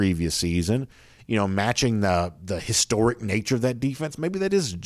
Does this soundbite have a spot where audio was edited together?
no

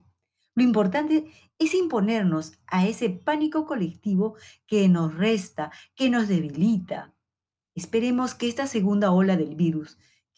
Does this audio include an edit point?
no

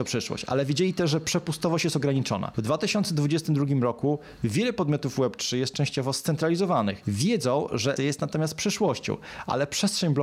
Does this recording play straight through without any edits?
no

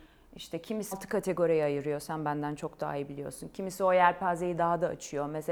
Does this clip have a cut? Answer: yes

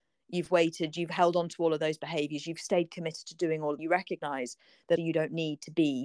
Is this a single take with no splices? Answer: no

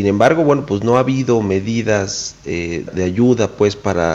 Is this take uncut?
no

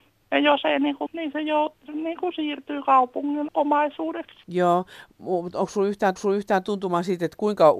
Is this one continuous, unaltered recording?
no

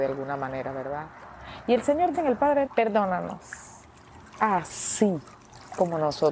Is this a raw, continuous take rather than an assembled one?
no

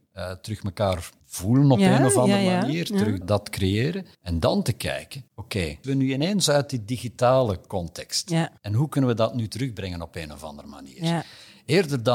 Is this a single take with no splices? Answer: no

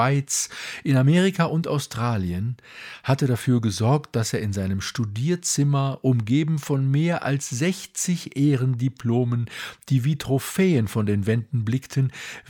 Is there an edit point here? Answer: no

